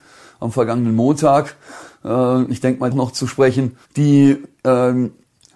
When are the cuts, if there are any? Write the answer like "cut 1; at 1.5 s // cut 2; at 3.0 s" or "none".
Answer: cut 1; at 2.9 s // cut 2; at 3.8 s